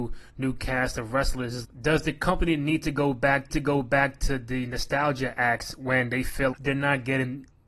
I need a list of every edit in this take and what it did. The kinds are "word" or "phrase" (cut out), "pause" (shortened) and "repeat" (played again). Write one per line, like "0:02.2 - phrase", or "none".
0:01.6 - word
0:03.5 - repeat
0:06.5 - word